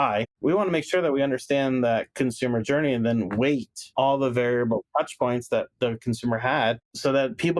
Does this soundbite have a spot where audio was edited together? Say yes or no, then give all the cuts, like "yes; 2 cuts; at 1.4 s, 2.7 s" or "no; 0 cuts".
no; 0 cuts